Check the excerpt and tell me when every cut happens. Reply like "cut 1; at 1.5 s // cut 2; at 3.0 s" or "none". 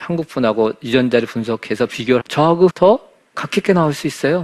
cut 1; at 2.2 s // cut 2; at 2.7 s